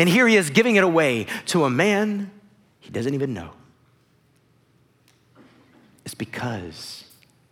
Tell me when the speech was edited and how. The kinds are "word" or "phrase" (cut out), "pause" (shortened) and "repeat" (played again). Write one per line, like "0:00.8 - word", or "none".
none